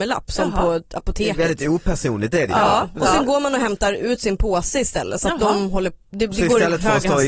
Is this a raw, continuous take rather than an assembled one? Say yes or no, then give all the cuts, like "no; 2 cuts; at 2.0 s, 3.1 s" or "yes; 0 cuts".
yes; 0 cuts